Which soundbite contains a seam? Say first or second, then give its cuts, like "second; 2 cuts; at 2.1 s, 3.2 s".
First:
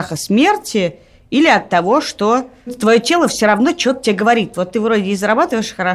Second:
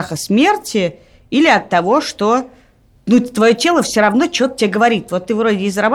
first; 1 cut; at 2.7 s